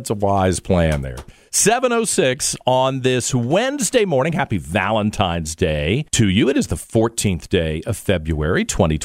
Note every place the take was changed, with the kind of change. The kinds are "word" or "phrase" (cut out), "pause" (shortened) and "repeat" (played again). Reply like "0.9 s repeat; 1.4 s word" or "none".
6.1 s pause